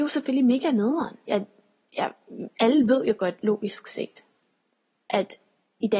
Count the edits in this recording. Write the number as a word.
one